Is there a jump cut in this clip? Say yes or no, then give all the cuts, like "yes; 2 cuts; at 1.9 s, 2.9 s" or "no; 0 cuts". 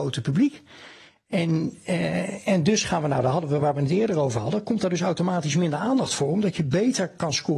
no; 0 cuts